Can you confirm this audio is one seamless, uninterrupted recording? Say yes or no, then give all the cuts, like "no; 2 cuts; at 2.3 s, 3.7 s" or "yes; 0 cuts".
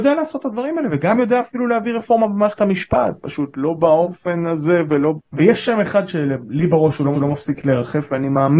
no; 2 cuts; at 5.2 s, 7.1 s